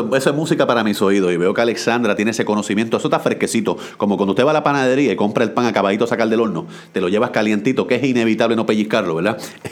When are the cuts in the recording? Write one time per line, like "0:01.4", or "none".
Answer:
none